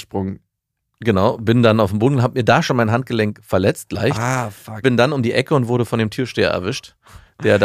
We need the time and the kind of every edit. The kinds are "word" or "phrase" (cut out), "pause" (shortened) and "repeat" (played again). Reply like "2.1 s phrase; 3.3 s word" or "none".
none